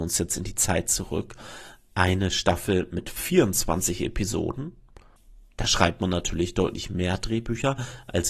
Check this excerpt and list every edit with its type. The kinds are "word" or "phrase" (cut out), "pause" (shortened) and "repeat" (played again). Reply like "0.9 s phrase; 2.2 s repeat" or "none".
none